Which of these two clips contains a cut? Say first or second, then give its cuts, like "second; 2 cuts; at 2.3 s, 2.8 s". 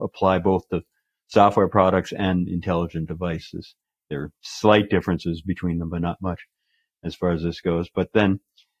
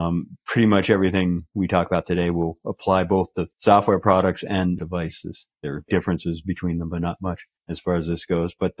second; 5 cuts; at 3.5 s, 4.8 s, 5.5 s, 5.9 s, 7.6 s